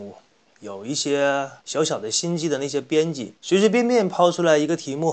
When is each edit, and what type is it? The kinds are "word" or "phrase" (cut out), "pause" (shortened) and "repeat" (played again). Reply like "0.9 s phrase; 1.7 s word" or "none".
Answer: 1.6 s pause; 3.4 s pause